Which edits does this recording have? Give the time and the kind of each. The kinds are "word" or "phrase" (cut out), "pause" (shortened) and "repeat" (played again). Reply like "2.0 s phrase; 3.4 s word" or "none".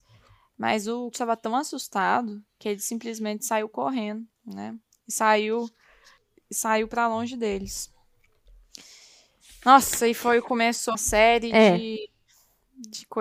1.1 s word; 4.3 s pause; 6.2 s pause; 10.9 s word